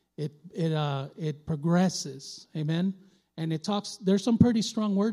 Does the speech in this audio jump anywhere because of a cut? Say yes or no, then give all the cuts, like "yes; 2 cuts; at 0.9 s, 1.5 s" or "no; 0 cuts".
no; 0 cuts